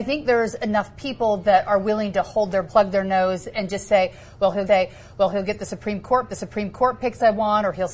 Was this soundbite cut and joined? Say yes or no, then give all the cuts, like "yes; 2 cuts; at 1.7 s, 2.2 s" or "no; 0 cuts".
yes; 3 cuts; at 2.6 s, 4.7 s, 6.3 s